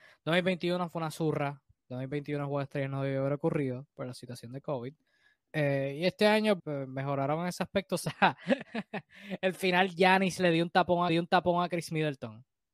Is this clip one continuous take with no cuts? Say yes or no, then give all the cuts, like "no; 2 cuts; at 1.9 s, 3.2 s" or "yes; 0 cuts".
no; 2 cuts; at 6.6 s, 11.1 s